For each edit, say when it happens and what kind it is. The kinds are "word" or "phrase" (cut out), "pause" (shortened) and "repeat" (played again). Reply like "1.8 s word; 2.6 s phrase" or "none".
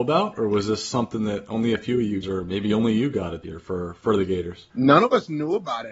2.2 s word; 3.4 s word